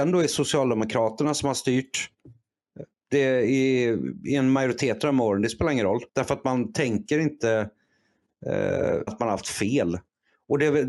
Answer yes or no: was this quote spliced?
yes